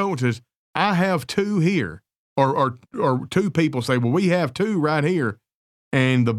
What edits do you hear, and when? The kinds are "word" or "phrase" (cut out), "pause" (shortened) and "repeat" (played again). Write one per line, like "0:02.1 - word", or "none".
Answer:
none

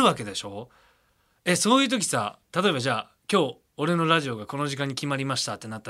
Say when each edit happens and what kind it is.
0:02.5 - word

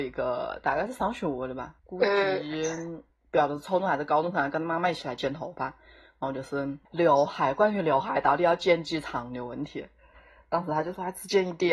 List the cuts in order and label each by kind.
0:01.8 - pause
0:03.1 - pause
0:06.8 - pause

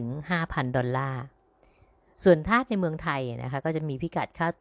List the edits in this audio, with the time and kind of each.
none

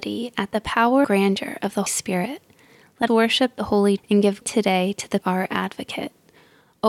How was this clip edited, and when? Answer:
0:01.0 - word
0:01.9 - word
0:03.1 - word
0:04.0 - word
0:04.4 - word
0:05.2 - word

